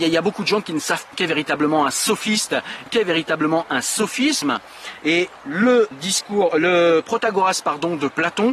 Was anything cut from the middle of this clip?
yes; 3 cuts; at 1.1 s, 2.9 s, 5.9 s

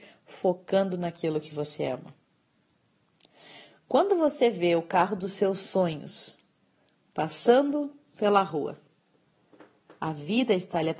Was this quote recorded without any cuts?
yes; 0 cuts

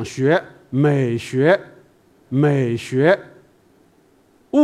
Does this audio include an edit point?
yes; 1 cut; at 2.3 s

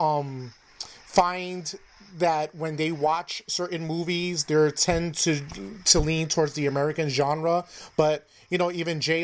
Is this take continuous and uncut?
yes; 0 cuts

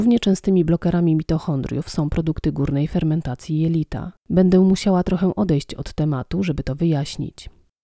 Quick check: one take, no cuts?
no; 1 cut; at 4.2 s

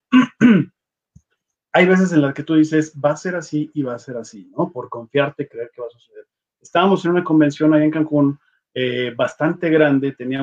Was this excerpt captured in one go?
yes; 0 cuts

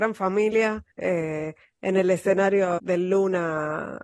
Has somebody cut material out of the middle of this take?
yes; 2 cuts; at 0.9 s, 2.8 s

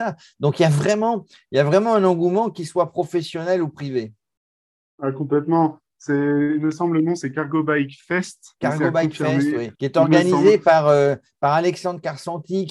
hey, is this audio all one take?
no; 1 cut; at 9.7 s

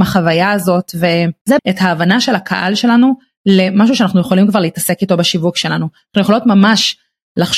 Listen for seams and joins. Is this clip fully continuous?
no; 1 cut; at 1.6 s

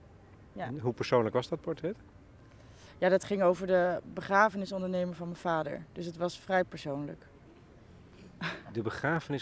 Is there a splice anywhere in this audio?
no; 0 cuts

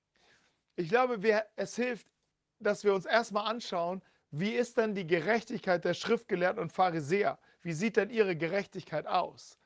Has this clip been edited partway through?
no; 0 cuts

